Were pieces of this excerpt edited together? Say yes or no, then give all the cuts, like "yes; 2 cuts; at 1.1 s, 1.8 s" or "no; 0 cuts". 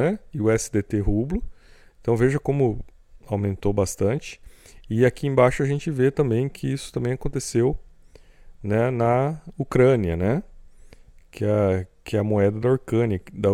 no; 0 cuts